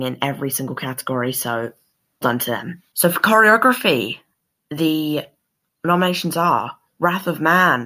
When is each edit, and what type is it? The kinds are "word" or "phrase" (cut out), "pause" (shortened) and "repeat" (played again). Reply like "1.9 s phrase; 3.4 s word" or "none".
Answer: 2.2 s word; 2.9 s pause